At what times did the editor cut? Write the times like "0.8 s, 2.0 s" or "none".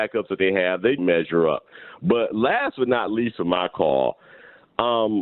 1.0 s